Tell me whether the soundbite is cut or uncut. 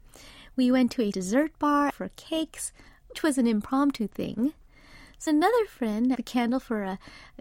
cut